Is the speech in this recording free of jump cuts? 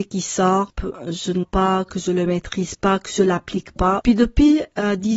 no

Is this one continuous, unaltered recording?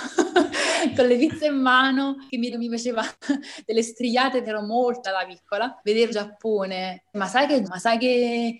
no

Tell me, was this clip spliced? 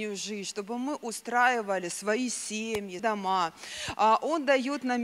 yes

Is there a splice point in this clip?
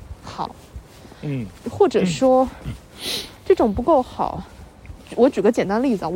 yes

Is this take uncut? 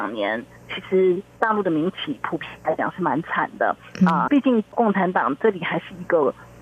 no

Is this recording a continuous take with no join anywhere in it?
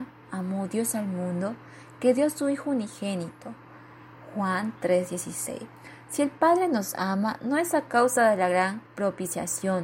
no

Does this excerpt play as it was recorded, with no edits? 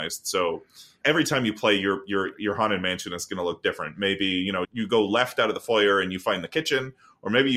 no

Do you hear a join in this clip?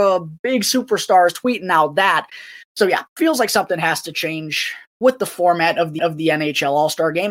yes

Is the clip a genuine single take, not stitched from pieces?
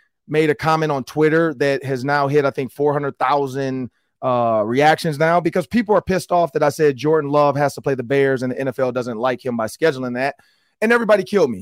yes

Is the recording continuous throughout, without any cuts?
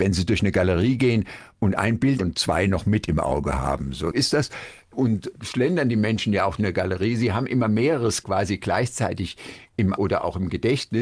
no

